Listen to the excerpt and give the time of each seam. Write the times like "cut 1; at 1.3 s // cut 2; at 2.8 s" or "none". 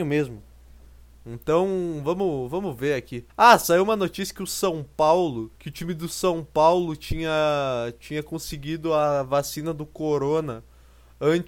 cut 1; at 3.3 s // cut 2; at 5.6 s